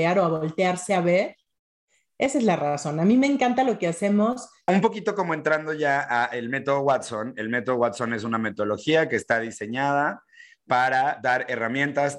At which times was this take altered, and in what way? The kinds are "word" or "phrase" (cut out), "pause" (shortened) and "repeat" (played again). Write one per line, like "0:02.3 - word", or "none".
none